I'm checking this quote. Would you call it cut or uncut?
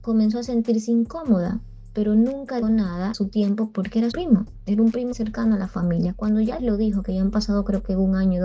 cut